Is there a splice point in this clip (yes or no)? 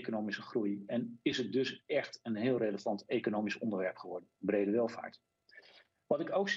no